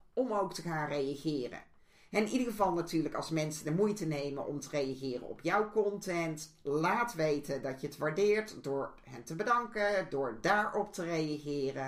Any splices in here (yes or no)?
no